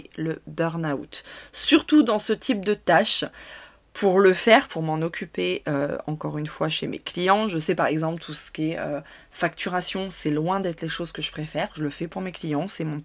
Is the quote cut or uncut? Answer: uncut